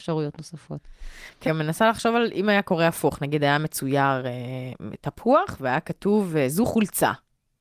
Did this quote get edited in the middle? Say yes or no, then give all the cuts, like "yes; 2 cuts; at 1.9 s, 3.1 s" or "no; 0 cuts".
yes; 1 cut; at 1.4 s